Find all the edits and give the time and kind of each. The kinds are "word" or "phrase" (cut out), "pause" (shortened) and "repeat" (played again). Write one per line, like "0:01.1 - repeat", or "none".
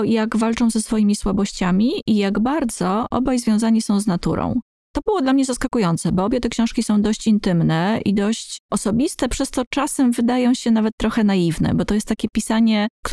none